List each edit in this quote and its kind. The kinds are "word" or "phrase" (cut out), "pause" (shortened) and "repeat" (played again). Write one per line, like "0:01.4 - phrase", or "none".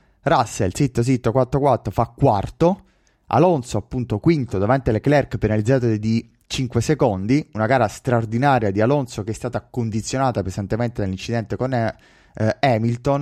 none